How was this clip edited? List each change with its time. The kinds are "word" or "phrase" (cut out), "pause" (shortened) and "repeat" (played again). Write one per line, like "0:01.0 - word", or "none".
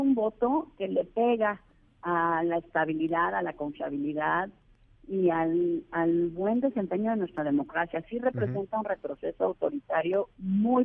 none